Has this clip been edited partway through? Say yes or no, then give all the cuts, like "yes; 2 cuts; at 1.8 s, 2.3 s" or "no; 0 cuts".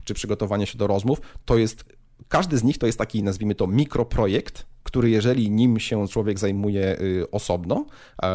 no; 0 cuts